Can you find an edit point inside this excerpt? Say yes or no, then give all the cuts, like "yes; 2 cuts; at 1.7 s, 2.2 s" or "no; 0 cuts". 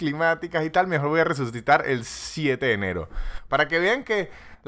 no; 0 cuts